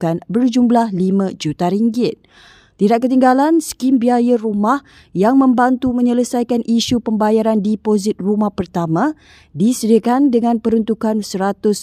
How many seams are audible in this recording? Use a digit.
0